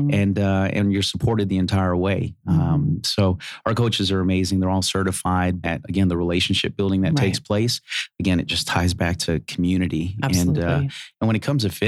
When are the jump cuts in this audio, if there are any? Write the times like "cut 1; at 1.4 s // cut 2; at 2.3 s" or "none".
cut 1; at 5.6 s

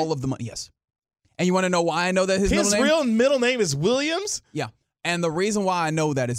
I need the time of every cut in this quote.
none

